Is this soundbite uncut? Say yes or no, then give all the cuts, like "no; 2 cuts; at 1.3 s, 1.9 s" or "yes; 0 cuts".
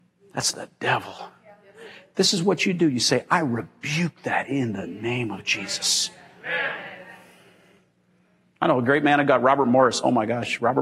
yes; 0 cuts